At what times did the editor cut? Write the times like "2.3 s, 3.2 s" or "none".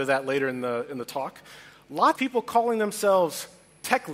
2.2 s